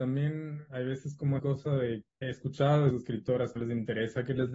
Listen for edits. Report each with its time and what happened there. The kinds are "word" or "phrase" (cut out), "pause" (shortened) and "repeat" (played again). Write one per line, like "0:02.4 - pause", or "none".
0:01.4 - word
0:02.2 - word
0:02.9 - word
0:03.6 - word